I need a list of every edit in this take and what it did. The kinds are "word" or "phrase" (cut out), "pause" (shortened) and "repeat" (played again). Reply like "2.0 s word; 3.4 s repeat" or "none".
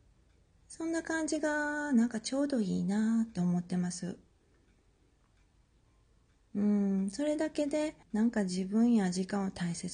8.0 s pause